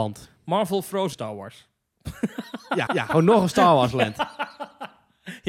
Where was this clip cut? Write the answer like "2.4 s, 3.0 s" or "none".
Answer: 1.1 s, 2.9 s